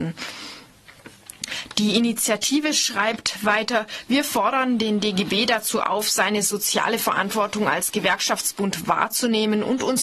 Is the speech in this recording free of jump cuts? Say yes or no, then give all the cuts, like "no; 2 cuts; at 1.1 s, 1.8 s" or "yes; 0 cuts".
yes; 0 cuts